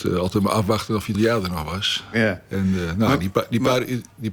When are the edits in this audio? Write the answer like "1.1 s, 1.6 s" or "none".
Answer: 1.1 s